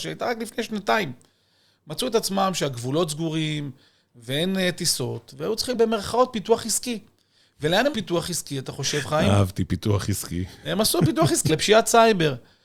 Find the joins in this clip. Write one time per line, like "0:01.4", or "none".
0:05.7
0:07.9
0:11.5